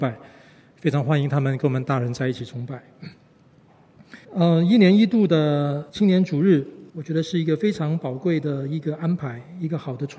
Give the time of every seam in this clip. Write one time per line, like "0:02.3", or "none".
0:04.2
0:05.9
0:06.9